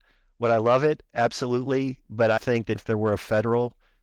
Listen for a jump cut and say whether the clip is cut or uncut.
cut